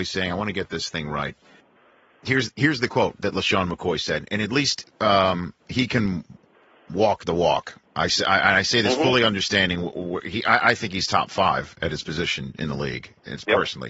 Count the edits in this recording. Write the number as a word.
zero